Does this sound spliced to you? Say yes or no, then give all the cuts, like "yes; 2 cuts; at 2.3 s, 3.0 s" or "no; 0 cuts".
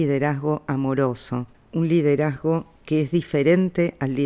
yes; 2 cuts; at 1.5 s, 2.7 s